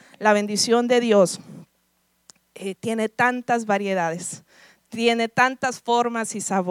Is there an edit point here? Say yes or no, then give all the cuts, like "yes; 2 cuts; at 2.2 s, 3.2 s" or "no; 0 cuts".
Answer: no; 0 cuts